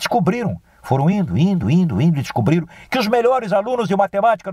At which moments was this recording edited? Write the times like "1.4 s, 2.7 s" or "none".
none